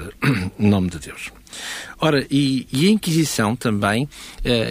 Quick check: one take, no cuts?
yes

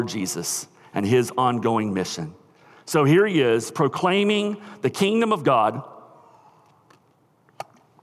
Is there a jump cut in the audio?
no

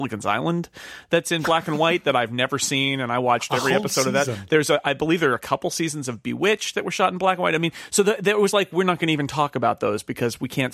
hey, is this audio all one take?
yes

